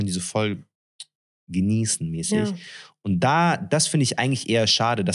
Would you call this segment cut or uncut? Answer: uncut